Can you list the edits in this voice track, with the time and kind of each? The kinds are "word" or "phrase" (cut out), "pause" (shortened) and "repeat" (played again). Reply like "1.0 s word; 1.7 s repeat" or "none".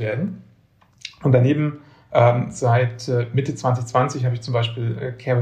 none

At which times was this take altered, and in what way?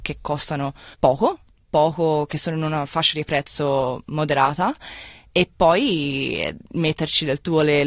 0.9 s pause; 6.6 s pause

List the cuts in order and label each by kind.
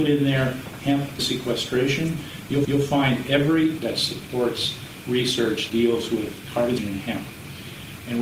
1.2 s word; 2.6 s repeat; 3.8 s word; 5.7 s word; 6.8 s word

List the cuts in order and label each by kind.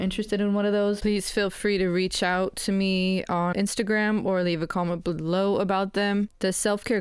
3.5 s word

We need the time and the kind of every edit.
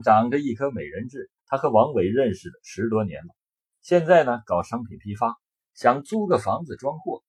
1.4 s pause

